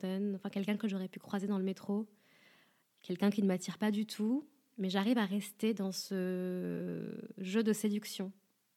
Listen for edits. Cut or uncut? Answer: uncut